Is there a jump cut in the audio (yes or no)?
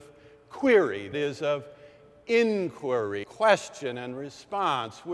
yes